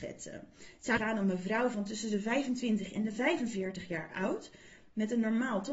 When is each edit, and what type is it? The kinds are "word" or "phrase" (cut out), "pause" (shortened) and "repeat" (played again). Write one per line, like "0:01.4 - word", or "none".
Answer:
0:01.0 - word